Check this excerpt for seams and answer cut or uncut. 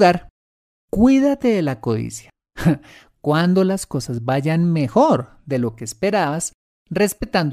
uncut